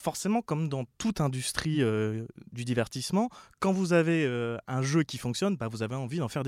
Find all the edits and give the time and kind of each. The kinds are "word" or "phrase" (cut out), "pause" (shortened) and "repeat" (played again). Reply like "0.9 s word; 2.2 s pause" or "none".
none